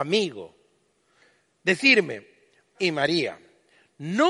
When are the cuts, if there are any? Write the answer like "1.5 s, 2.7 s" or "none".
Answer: 2.7 s